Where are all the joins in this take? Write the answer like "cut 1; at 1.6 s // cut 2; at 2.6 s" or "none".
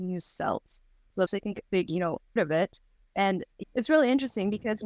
cut 1; at 1.3 s // cut 2; at 1.7 s // cut 3; at 2.4 s // cut 4; at 3.6 s